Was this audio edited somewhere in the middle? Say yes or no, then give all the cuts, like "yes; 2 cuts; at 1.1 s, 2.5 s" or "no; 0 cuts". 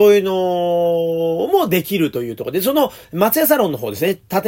yes; 1 cut; at 3.0 s